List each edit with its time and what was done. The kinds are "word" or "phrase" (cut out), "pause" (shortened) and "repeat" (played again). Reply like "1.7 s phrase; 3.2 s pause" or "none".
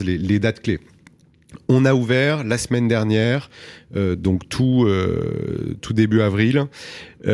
none